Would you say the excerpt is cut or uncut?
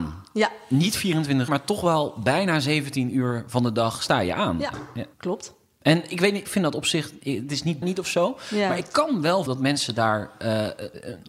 cut